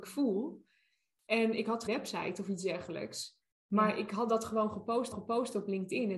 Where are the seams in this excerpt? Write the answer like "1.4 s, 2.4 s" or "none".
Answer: 1.9 s, 5.1 s